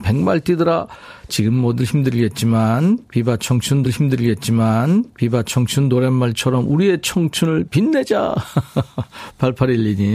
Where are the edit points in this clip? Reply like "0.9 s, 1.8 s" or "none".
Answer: 3.8 s